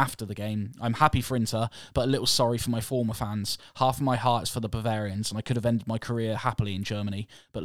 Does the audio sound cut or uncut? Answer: uncut